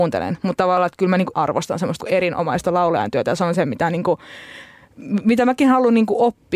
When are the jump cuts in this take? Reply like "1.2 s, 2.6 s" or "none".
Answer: 1.3 s, 2.0 s